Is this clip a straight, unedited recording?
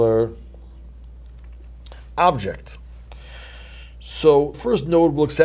no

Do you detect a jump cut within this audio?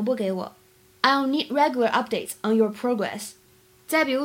no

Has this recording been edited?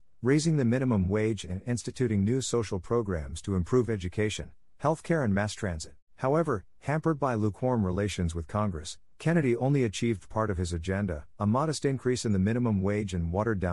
yes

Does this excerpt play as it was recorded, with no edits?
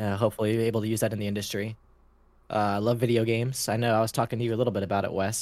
yes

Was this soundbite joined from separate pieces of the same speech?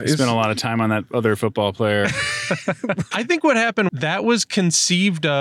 yes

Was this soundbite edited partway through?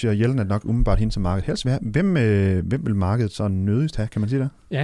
no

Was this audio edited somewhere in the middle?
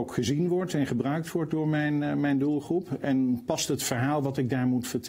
no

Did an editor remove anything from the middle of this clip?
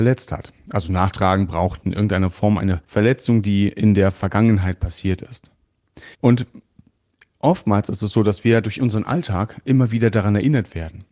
yes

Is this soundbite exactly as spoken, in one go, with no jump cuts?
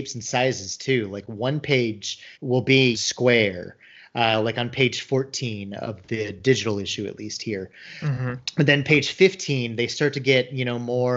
no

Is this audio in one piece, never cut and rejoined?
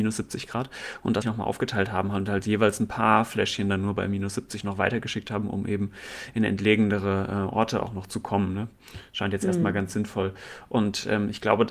no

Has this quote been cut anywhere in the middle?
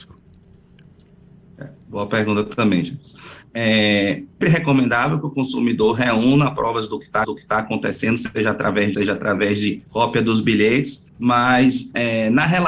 yes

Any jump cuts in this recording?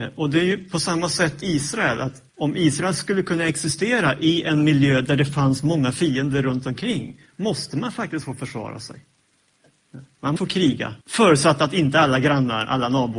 yes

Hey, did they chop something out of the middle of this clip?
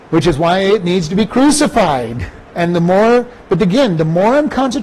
yes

